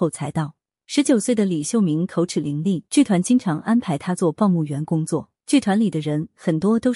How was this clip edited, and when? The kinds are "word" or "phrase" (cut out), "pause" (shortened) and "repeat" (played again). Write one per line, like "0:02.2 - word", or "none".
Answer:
0:02.9 - pause
0:05.4 - pause

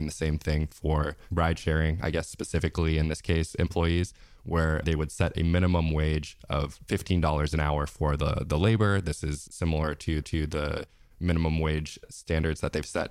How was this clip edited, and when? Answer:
0:09.5 - word
0:10.2 - repeat

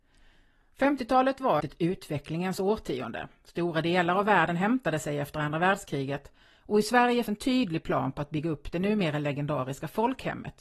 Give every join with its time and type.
0:01.6 - word
0:07.3 - word

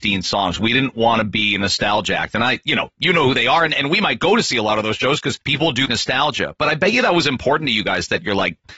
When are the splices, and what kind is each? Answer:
0:05.4 - pause
0:05.9 - word

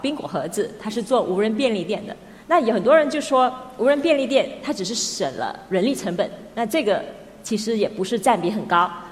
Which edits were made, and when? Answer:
0:02.4 - pause

